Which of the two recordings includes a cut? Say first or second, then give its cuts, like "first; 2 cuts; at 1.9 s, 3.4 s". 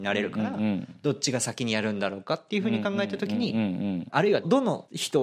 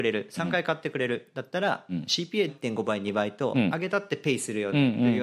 second; 1 cut; at 2.5 s